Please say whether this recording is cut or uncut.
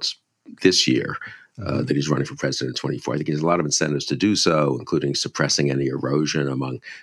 uncut